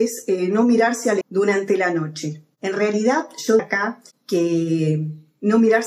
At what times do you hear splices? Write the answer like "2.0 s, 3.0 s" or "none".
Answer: 1.2 s, 3.6 s